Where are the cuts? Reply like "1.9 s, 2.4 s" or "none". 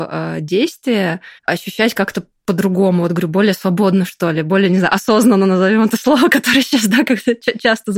1.4 s